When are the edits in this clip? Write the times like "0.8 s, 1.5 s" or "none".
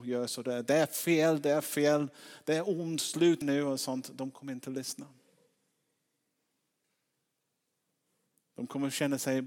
none